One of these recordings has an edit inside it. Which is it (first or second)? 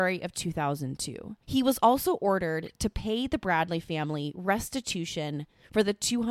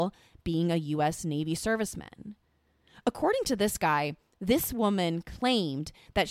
first